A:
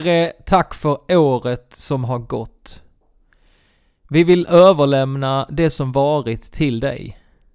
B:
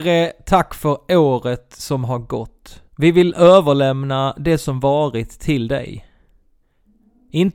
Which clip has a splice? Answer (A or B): B